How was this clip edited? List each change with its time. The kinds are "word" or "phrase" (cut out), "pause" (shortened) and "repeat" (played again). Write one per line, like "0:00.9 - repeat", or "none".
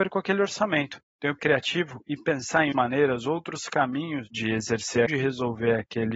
0:01.4 - phrase
0:02.7 - word
0:05.1 - phrase